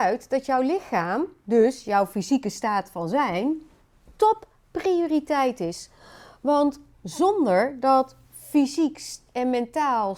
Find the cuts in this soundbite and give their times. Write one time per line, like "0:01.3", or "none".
none

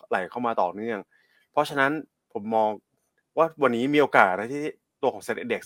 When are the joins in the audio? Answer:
none

